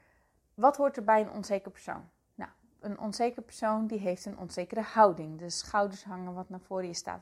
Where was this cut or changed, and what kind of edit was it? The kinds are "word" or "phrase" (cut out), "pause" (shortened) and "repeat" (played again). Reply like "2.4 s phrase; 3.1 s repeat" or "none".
none